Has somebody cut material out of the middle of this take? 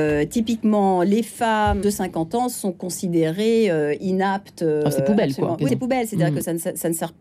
yes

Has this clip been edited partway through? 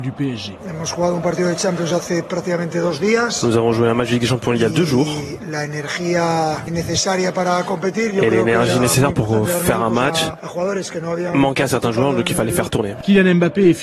no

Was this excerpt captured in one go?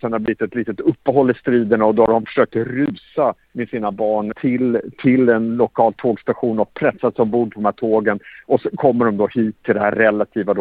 no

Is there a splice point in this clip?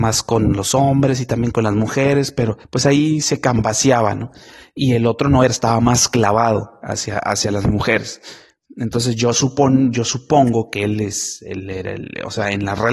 yes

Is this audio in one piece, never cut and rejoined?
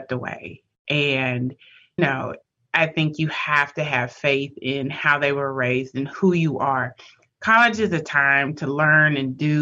no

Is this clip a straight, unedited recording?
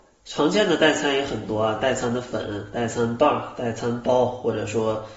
yes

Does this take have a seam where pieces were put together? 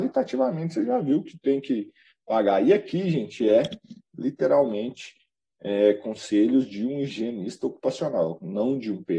no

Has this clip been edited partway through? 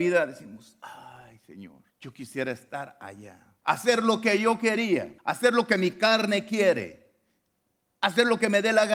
yes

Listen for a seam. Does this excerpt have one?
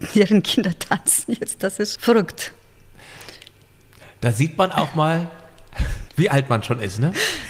yes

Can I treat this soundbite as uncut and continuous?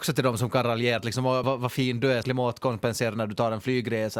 no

